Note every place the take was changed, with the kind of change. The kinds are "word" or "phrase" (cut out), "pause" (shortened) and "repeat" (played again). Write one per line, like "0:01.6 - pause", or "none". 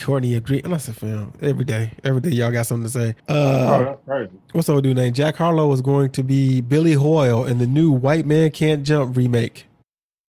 0:03.2 - pause